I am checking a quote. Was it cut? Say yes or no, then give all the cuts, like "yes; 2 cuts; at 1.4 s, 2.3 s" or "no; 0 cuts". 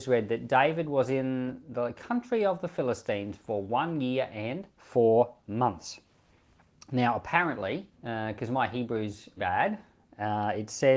yes; 3 cuts; at 4.7 s, 7.9 s, 9.4 s